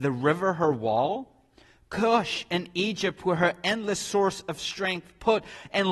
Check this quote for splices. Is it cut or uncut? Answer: uncut